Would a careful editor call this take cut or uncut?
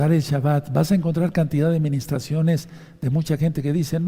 uncut